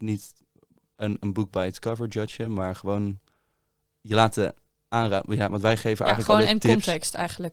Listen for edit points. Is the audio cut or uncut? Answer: uncut